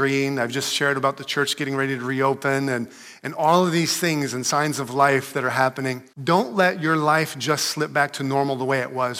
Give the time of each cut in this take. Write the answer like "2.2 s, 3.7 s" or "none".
6.1 s